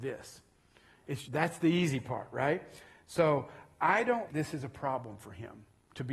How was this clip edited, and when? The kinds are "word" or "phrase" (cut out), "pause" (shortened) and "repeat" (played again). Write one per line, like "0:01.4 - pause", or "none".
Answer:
0:01.2 - word
0:04.3 - word